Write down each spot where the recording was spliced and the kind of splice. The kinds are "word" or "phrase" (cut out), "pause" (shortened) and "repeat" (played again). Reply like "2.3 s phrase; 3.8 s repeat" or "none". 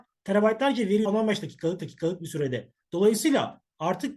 1.1 s phrase; 1.8 s repeat; 2.8 s pause